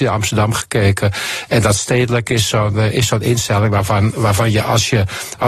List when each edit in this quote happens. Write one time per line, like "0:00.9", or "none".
none